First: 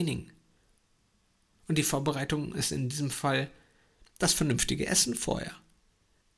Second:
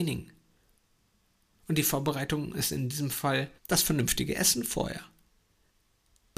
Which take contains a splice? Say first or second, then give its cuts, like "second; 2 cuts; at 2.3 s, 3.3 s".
second; 1 cut; at 3.6 s